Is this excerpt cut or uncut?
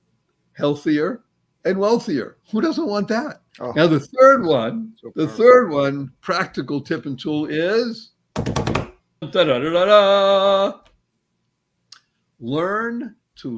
cut